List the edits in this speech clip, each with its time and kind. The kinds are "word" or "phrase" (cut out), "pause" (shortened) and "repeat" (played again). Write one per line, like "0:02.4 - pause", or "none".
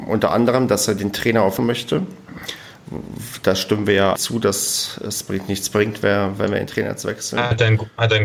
0:01.6 - phrase
0:04.2 - word